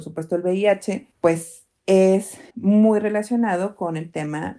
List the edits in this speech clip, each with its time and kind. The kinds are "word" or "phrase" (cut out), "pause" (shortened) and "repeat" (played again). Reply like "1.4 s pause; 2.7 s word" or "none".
1.1 s pause; 2.5 s pause